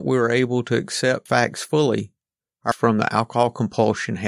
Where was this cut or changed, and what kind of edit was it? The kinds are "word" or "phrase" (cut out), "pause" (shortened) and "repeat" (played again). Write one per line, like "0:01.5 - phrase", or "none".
0:01.3 - word
0:02.7 - word